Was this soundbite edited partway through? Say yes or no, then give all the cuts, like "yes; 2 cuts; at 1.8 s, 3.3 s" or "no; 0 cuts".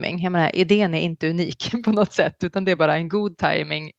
no; 0 cuts